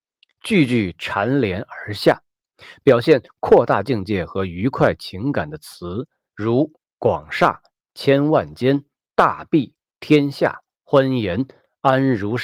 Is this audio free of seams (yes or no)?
yes